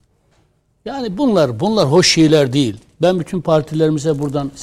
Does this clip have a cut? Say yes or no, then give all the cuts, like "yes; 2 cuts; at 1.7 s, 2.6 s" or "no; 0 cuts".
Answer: no; 0 cuts